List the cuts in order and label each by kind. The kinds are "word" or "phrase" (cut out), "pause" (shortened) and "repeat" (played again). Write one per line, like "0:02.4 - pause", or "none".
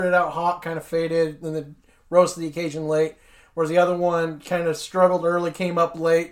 none